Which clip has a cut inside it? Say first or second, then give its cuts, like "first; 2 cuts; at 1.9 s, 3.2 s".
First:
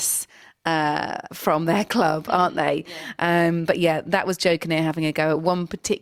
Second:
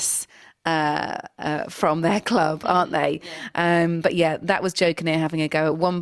first; 1 cut; at 1.3 s